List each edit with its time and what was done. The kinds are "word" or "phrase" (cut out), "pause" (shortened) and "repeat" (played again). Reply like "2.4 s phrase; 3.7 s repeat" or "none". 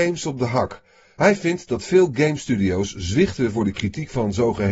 none